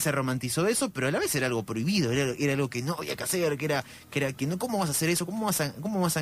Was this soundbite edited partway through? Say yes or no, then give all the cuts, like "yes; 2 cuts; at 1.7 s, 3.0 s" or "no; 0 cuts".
yes; 1 cut; at 4.4 s